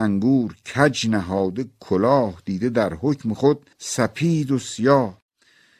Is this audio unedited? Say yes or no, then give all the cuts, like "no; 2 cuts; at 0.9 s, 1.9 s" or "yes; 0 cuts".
no; 1 cut; at 3.7 s